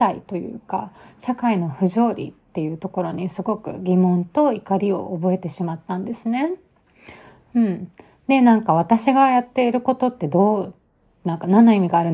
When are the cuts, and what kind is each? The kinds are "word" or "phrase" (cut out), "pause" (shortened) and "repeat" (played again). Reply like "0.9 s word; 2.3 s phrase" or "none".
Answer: none